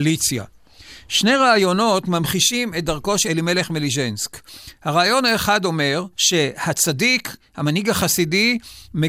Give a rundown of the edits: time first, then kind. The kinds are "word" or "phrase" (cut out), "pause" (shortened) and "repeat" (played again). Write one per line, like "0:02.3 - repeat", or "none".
0:03.2 - word
0:06.1 - pause